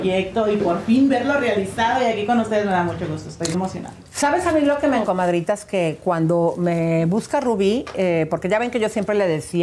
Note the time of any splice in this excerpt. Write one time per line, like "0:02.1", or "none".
0:03.5
0:05.0